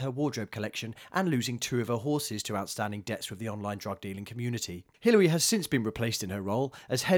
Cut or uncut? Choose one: cut